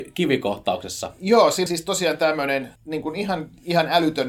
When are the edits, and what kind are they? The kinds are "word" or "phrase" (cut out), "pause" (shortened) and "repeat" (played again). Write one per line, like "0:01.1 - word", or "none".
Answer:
0:01.7 - word
0:02.8 - pause